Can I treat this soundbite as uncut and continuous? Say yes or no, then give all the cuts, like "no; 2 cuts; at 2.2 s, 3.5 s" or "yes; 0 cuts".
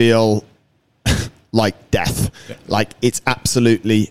yes; 0 cuts